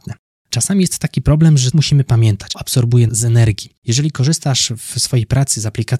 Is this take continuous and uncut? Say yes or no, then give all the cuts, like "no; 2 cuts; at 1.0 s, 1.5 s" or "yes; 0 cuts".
no; 4 cuts; at 1.7 s, 2.5 s, 3.1 s, 3.8 s